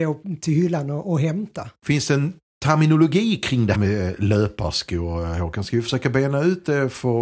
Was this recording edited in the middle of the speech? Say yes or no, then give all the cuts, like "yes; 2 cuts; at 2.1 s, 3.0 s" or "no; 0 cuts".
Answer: yes; 1 cut; at 3.7 s